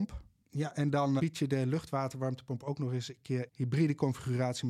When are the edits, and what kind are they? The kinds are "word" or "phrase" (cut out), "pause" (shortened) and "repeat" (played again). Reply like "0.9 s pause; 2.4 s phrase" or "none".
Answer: 1.2 s word; 3.5 s word